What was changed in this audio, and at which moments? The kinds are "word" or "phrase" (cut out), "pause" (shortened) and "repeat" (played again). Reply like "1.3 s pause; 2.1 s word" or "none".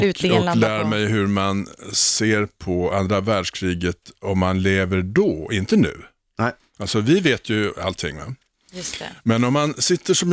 none